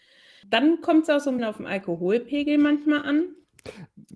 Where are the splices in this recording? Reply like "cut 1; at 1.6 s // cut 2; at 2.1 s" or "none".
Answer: cut 1; at 1.4 s